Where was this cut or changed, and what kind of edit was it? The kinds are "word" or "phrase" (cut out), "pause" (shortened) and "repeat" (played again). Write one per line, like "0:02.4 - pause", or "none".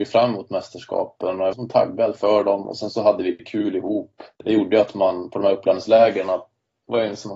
0:01.5 - word
0:04.3 - pause